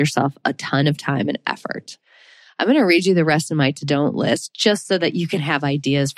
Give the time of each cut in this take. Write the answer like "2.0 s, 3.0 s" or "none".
none